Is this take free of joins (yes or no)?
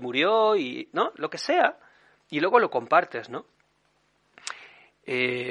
yes